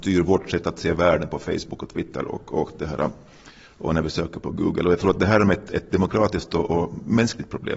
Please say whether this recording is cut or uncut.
uncut